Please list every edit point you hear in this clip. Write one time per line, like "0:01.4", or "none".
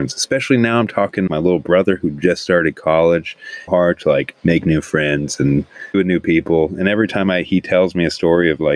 0:01.3
0:03.7
0:04.4
0:05.9